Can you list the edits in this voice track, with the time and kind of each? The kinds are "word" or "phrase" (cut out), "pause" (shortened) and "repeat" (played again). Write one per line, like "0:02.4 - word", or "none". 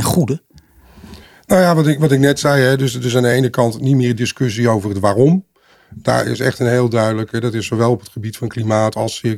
none